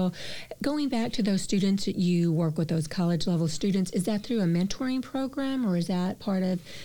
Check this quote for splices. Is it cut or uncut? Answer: uncut